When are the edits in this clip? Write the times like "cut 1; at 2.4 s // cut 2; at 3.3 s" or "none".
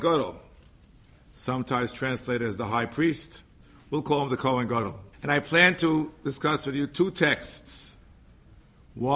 cut 1; at 5.1 s